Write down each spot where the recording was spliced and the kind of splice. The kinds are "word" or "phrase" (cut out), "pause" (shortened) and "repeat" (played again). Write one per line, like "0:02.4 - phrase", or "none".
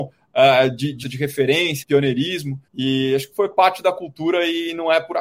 0:01.0 - word
0:01.8 - word
0:02.7 - pause
0:03.3 - word